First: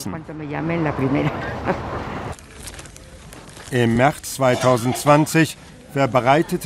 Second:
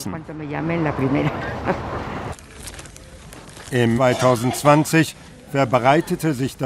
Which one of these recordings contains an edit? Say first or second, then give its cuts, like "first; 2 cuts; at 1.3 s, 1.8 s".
second; 1 cut; at 4.0 s